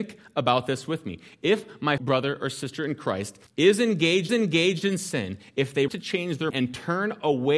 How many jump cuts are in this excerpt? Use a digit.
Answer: 5